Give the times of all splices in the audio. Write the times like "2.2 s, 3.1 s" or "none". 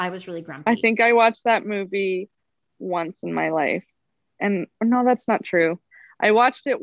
none